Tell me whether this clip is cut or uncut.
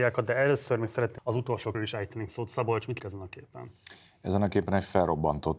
cut